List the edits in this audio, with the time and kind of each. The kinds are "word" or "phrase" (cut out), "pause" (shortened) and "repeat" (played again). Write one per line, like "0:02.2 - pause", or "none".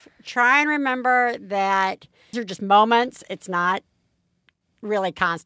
0:02.3 - word